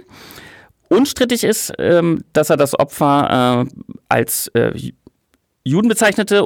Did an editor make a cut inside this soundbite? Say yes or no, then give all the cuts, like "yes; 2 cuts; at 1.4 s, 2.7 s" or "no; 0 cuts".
no; 0 cuts